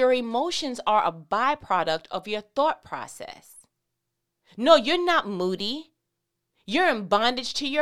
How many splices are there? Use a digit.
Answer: 0